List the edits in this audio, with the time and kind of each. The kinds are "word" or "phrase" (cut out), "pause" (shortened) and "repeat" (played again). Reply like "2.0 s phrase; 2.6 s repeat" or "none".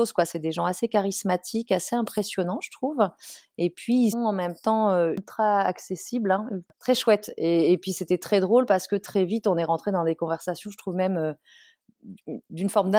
4.1 s word; 6.7 s pause